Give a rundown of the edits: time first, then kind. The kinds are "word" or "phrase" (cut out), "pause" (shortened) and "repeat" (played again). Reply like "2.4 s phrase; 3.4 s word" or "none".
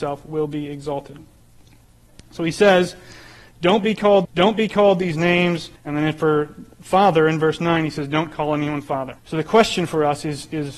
4.2 s repeat; 5.8 s pause; 9.2 s pause